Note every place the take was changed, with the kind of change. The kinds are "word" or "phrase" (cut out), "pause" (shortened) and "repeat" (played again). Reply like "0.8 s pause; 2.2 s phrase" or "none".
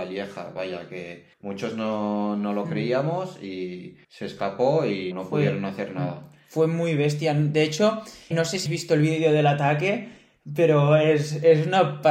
1.3 s pause; 4.0 s pause; 5.1 s word; 8.3 s word; 8.7 s word